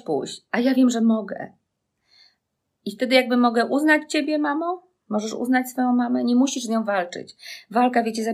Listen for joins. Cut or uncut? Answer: uncut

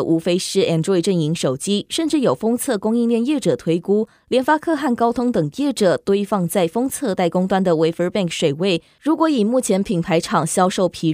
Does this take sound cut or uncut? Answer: uncut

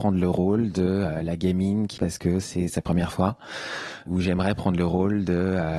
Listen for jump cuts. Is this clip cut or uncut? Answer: cut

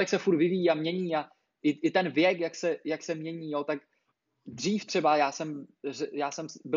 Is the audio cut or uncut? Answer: uncut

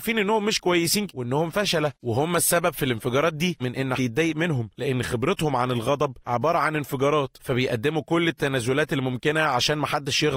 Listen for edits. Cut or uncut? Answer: cut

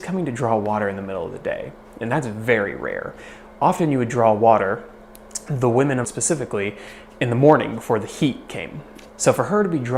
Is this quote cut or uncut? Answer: cut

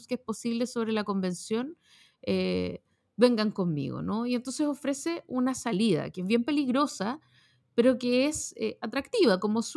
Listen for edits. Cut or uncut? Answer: uncut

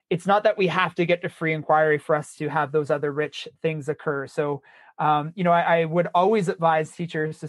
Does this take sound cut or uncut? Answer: uncut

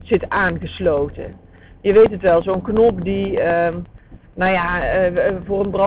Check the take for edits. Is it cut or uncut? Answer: uncut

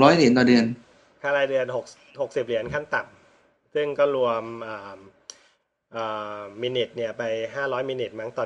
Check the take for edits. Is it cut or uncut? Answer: uncut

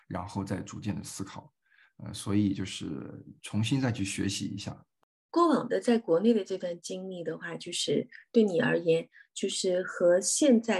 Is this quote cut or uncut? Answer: uncut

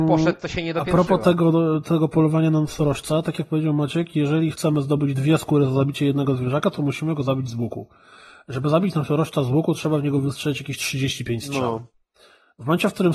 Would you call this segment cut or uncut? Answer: uncut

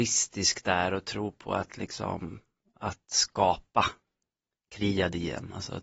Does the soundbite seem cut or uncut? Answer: uncut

